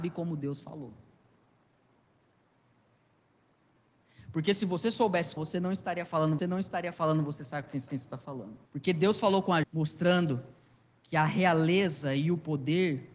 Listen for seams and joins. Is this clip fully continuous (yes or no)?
no